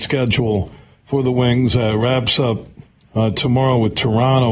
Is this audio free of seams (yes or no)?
yes